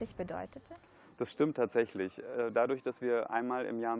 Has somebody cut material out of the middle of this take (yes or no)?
no